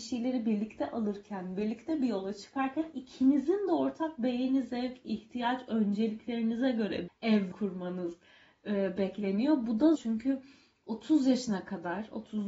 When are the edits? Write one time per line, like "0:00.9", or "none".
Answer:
0:07.1
0:07.5
0:10.0